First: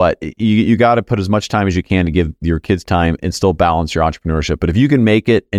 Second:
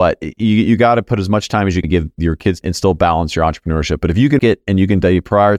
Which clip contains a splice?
second; 3 cuts; at 1.8 s, 2.6 s, 4.4 s

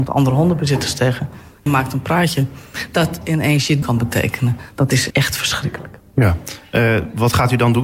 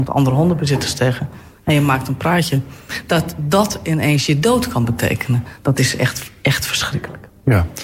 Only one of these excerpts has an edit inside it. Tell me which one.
first; 4 cuts; at 1.7 s, 3.2 s, 3.8 s, 5.1 s

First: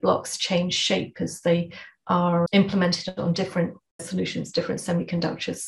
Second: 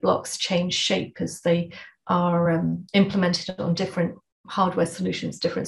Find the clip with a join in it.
first; 2 cuts; at 2.5 s, 4.0 s

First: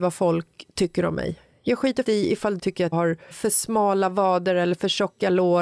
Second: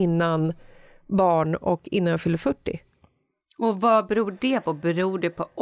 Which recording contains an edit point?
first; 4 cuts; at 2.0 s, 2.6 s, 2.9 s, 3.3 s

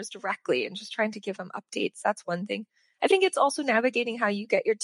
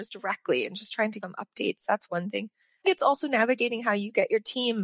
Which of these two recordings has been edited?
second; 2 cuts; at 1.2 s, 2.8 s

